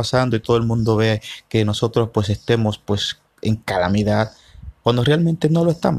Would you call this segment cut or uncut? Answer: uncut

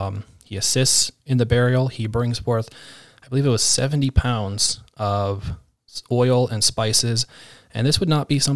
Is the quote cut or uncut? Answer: uncut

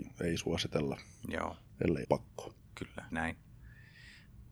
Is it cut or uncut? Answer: cut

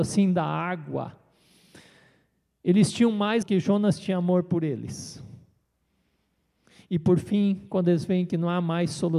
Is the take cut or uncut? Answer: cut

